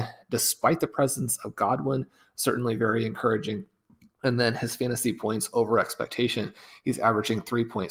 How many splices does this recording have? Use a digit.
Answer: 0